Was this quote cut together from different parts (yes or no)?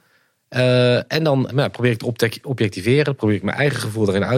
yes